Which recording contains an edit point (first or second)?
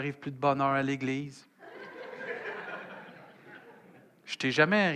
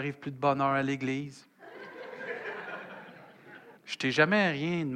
second